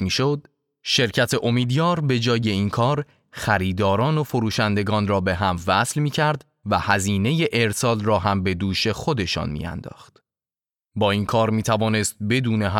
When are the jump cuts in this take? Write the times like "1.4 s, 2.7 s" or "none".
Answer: none